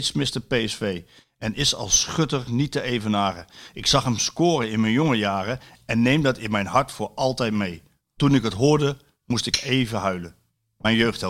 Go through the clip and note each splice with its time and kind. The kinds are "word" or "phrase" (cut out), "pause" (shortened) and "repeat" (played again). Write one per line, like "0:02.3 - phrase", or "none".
none